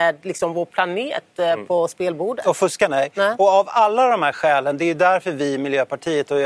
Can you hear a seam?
no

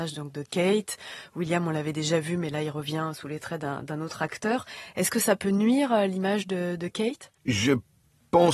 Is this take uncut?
no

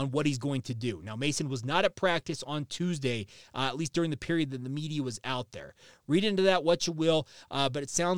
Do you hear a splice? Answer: no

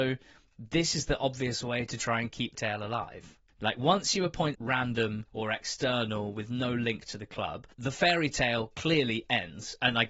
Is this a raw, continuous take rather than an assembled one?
no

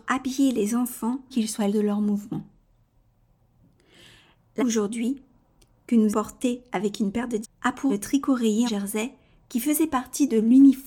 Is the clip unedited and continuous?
no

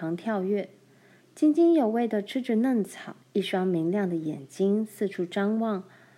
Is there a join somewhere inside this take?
yes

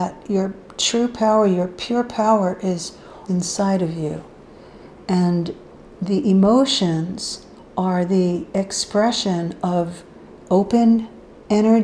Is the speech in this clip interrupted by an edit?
yes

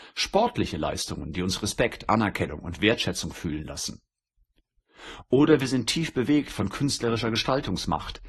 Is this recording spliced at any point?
no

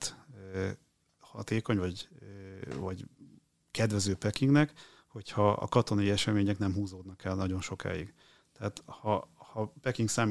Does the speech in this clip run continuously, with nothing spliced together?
yes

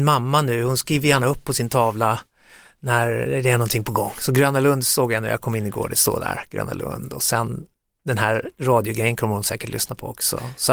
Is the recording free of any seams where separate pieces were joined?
yes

